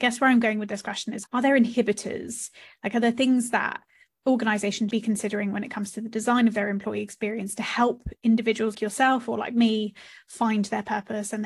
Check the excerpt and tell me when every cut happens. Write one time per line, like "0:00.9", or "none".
0:01.2
0:04.9
0:08.7